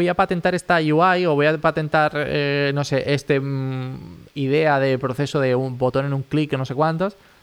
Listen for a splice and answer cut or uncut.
uncut